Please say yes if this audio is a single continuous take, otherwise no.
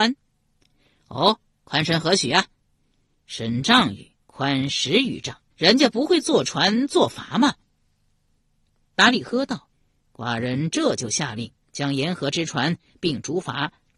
no